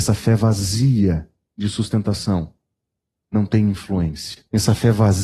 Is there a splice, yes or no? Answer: no